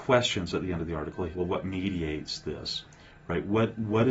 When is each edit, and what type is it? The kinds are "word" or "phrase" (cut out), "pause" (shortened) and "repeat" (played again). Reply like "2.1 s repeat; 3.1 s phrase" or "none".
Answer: 1.3 s word